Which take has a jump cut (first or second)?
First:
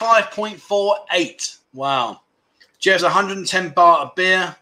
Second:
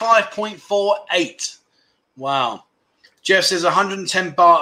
first